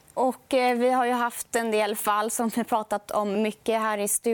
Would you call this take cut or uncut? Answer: uncut